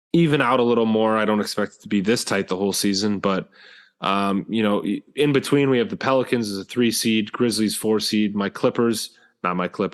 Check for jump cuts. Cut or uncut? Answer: uncut